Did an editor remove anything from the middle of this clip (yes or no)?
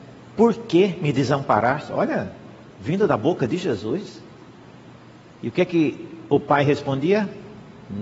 no